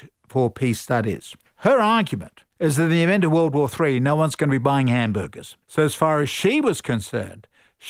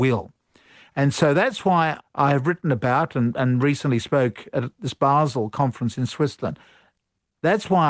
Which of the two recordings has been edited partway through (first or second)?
first